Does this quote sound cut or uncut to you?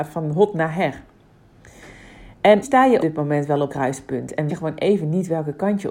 cut